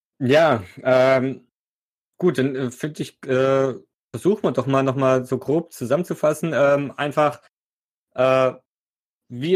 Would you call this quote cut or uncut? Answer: uncut